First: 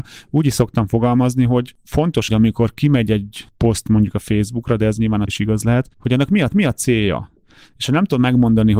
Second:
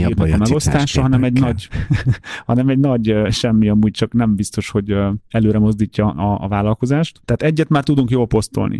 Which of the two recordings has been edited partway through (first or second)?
first